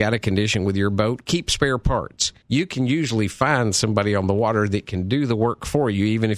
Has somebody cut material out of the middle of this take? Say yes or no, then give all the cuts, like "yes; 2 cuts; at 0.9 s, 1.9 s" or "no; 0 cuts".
yes; 1 cut; at 2.4 s